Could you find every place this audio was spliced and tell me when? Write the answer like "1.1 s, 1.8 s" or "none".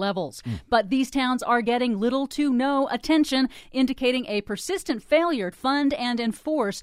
5.5 s